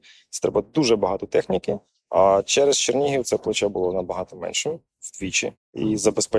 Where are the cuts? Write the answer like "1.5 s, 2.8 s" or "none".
none